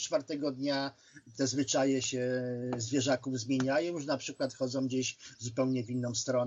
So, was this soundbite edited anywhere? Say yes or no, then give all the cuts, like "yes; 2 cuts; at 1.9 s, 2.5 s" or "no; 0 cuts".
no; 0 cuts